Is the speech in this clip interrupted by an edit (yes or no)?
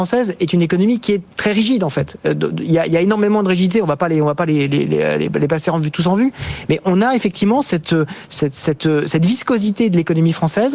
yes